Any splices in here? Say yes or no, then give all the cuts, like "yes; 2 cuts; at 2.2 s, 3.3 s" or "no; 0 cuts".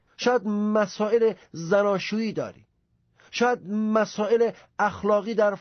no; 0 cuts